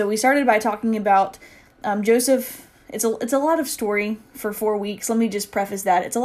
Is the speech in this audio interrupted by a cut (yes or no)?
no